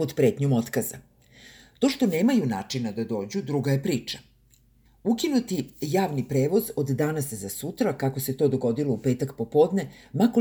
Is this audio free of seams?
yes; 0 cuts

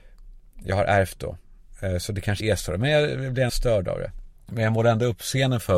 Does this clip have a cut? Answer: yes; 3 cuts; at 2.4 s, 3.5 s, 4.4 s

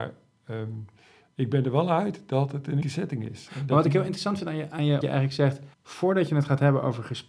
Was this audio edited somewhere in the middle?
yes; 3 cuts; at 2.8 s, 5.0 s, 5.7 s

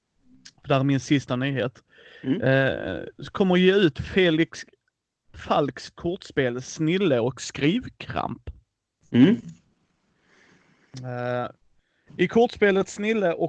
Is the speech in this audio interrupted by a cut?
no; 0 cuts

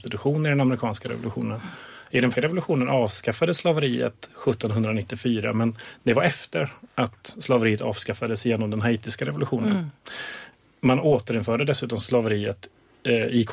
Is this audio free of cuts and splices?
no; 1 cut; at 2.3 s

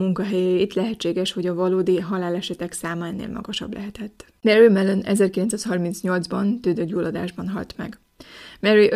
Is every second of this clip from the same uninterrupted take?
yes; 0 cuts

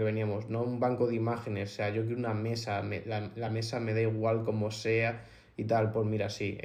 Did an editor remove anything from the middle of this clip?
no; 0 cuts

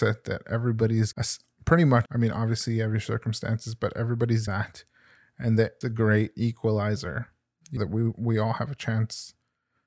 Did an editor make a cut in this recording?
yes; 5 cuts; at 1.1 s, 2.1 s, 4.5 s, 5.8 s, 7.8 s

